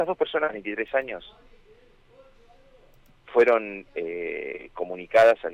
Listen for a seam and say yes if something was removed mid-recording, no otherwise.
no